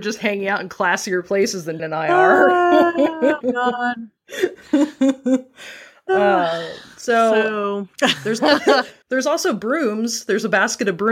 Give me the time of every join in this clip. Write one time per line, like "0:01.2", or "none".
0:01.8
0:03.4
0:07.9
0:09.0